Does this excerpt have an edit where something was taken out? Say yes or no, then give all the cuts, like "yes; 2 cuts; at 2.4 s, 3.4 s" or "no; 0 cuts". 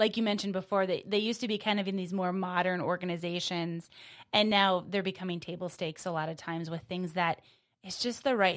no; 0 cuts